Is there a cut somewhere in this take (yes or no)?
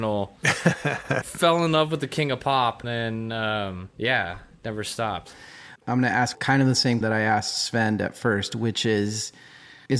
yes